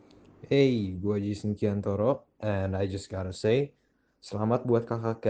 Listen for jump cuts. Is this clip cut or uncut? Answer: uncut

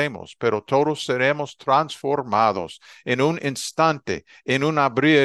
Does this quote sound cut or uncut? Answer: uncut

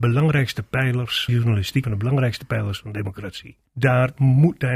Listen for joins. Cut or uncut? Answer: cut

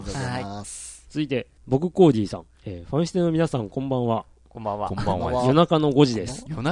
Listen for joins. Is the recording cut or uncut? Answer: cut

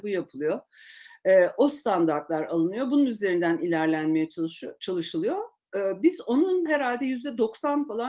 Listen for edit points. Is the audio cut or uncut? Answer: cut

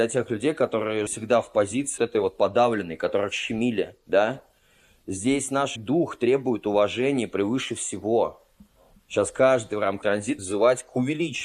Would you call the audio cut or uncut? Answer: cut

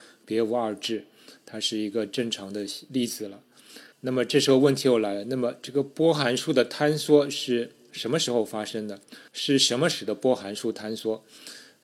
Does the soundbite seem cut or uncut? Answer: cut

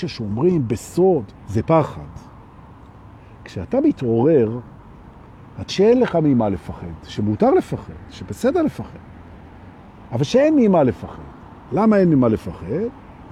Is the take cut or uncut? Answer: cut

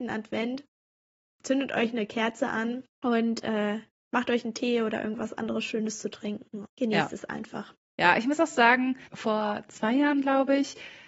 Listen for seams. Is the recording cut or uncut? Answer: cut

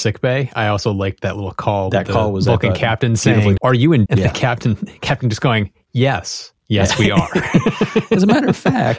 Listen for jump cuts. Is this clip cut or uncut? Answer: cut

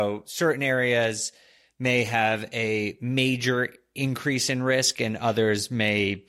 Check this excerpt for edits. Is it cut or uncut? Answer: uncut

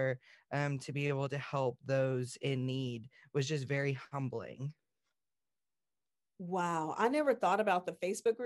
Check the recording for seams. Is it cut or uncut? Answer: uncut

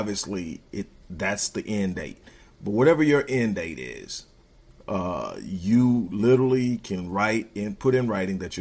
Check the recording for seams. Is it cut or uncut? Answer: uncut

